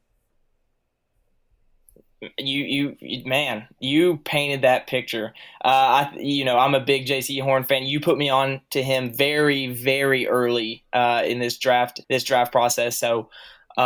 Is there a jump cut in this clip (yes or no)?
yes